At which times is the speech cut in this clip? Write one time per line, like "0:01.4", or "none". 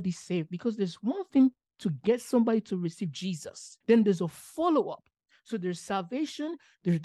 0:03.8

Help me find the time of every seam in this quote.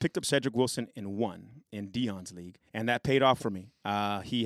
0:02.7
0:03.4

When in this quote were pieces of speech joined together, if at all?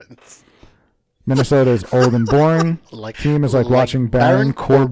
0:03.1

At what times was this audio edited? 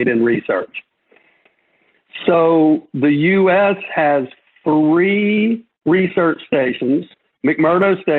none

